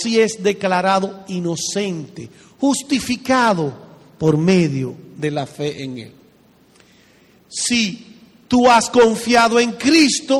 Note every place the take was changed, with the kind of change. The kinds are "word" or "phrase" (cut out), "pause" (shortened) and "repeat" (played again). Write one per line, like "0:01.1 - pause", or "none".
none